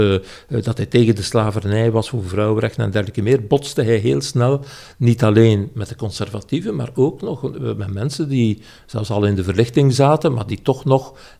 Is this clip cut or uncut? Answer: uncut